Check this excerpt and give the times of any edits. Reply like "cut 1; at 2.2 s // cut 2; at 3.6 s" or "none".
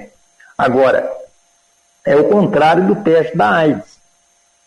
none